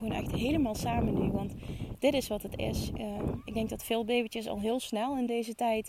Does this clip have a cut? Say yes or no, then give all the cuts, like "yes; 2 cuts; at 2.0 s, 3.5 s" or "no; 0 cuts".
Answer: no; 0 cuts